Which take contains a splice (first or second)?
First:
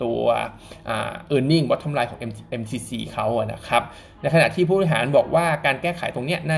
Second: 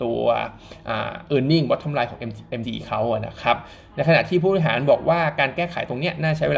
second